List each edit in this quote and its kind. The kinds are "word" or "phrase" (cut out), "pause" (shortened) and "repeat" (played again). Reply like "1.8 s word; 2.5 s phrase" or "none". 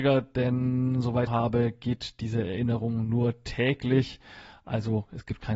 1.3 s phrase